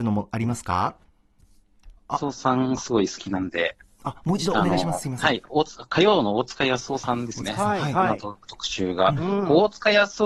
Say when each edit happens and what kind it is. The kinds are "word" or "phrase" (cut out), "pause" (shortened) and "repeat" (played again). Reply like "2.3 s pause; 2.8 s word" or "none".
2.0 s pause